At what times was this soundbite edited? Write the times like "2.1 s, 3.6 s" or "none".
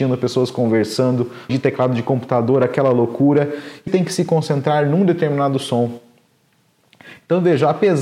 1.5 s, 3.9 s

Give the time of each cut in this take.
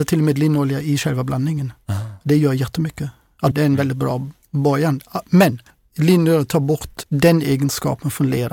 3.5 s, 5.7 s, 7.0 s

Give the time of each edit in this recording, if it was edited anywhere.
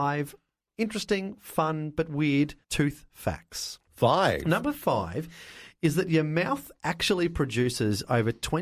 2.6 s

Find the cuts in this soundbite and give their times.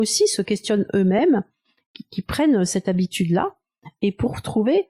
none

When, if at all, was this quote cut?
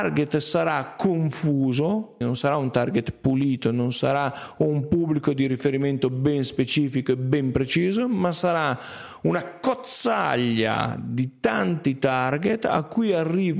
2.2 s

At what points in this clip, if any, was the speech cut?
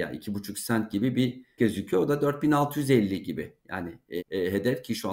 1.6 s, 4.2 s

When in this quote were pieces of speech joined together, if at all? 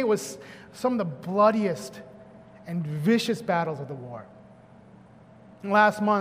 none

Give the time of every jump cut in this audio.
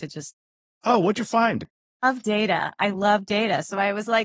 none

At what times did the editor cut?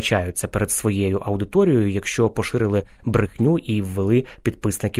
none

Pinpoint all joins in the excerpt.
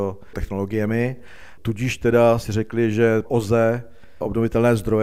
2.4 s, 3.2 s

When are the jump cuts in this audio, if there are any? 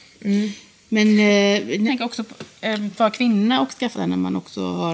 1.9 s, 3.0 s, 3.9 s

